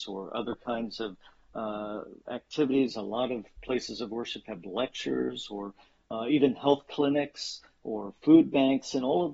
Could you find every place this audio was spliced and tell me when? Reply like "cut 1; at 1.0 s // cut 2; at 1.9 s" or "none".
none